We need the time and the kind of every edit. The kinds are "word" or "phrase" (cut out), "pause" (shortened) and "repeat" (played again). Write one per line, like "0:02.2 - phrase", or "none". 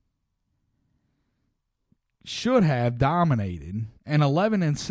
0:04.0 - pause